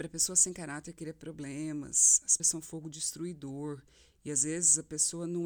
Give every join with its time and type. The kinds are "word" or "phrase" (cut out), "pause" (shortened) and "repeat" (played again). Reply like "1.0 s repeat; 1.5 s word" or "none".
2.4 s word